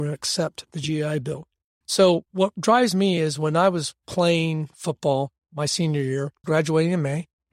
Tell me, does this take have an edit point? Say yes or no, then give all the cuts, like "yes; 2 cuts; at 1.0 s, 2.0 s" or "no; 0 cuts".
no; 0 cuts